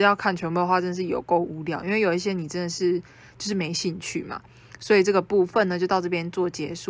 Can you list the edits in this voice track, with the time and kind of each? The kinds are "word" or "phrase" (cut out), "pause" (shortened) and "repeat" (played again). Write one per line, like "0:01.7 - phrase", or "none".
none